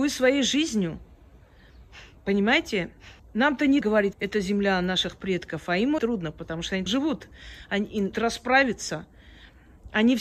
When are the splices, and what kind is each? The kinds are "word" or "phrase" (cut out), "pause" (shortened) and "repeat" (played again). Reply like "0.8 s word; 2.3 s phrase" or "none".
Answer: 3.2 s pause; 3.8 s word; 4.1 s word; 6.0 s word; 6.9 s word; 8.1 s phrase